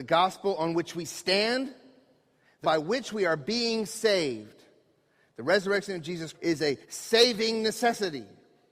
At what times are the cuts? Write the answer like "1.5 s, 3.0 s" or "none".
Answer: 2.6 s, 6.3 s, 6.8 s